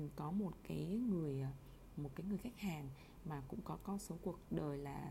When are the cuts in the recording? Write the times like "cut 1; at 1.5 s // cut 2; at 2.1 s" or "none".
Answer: none